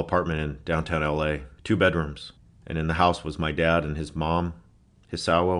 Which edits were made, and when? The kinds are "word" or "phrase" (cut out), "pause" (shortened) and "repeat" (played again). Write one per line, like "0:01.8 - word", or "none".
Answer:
0:01.6 - pause